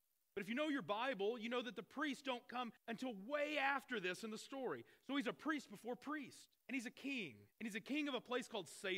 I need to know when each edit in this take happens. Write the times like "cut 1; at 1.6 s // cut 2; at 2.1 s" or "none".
cut 1; at 2.8 s // cut 2; at 6.6 s // cut 3; at 7.5 s